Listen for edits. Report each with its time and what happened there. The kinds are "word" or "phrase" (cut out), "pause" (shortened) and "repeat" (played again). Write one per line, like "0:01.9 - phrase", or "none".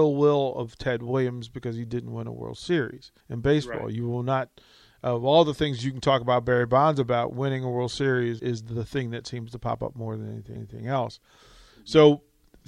0:03.2 - pause
0:08.4 - word
0:10.6 - repeat

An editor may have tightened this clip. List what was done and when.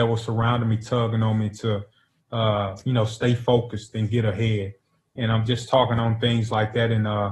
none

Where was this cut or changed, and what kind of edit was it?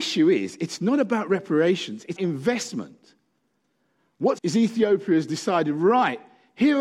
0:02.2 - word
0:04.4 - word

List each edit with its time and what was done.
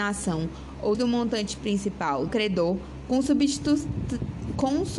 0:00.9 - word
0:02.3 - phrase

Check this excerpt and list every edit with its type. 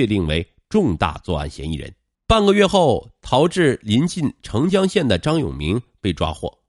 0:02.1 - pause

